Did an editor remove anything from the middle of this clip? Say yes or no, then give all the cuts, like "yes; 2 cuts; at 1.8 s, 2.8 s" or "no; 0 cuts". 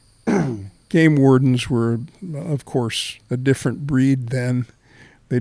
yes; 1 cut; at 3.2 s